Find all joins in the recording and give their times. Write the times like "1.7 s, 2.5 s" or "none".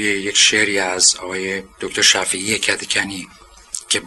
none

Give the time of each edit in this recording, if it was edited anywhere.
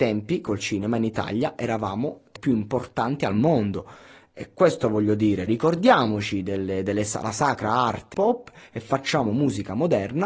2.4 s, 5.5 s, 8.1 s

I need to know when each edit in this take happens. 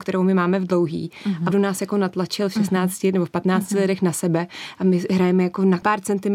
1.5 s

